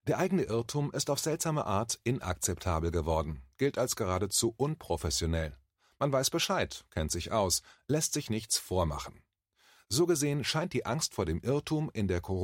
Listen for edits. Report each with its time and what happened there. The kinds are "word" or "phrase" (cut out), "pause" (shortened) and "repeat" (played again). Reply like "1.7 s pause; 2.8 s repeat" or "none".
none